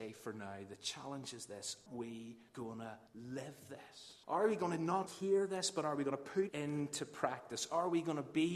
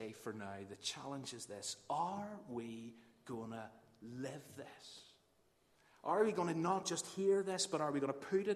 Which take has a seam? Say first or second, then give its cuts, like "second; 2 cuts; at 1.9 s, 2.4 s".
first; 6 cuts; at 1.9 s, 2.5 s, 3.1 s, 4.2 s, 5.1 s, 6.5 s